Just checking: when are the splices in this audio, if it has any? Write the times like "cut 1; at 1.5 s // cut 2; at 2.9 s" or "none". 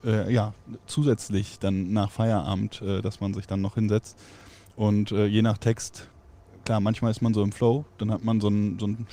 none